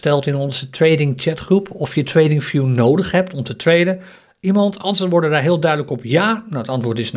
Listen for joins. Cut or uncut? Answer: uncut